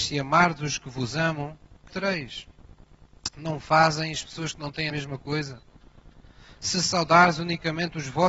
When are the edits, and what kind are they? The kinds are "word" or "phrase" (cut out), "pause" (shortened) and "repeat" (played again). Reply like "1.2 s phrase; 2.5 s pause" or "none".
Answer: 1.9 s word; 4.9 s phrase